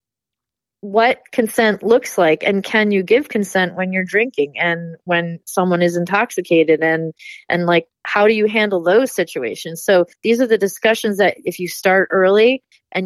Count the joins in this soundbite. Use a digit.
1